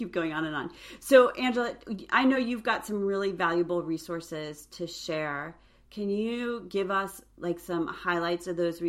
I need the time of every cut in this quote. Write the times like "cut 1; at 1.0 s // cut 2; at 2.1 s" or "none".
none